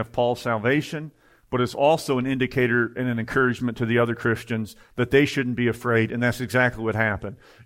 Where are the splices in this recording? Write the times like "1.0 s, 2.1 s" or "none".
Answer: none

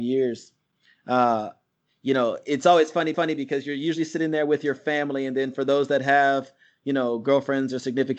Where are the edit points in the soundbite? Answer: 3.1 s

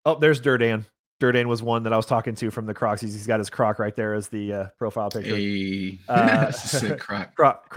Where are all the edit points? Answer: none

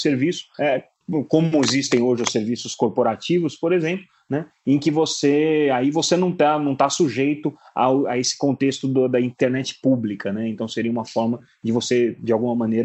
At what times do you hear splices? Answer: none

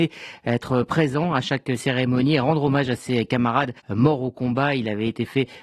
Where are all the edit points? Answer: 3.8 s

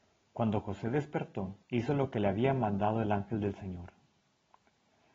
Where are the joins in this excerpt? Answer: 1.6 s

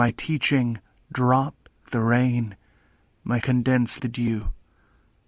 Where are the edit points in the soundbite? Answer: 1.9 s, 3.4 s, 4.0 s

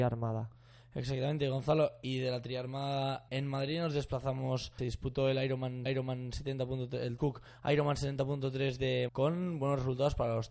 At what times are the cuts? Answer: 3.3 s, 4.8 s, 5.9 s, 7.2 s, 9.1 s

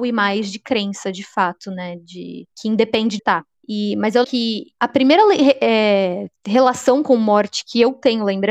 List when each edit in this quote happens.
3.2 s, 4.2 s, 6.4 s

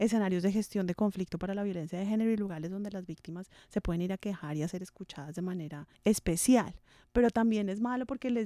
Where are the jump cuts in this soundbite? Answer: 5.9 s

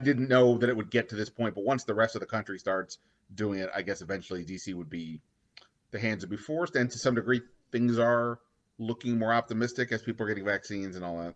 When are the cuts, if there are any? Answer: none

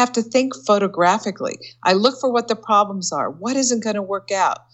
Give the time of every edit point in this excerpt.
none

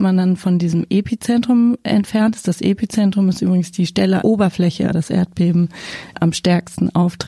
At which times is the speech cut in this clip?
4.2 s, 4.9 s, 6.1 s

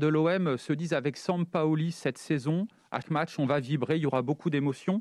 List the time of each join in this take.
3.0 s

